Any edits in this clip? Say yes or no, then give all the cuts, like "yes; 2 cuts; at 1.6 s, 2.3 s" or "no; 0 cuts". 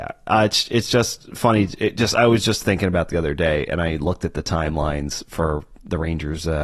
no; 0 cuts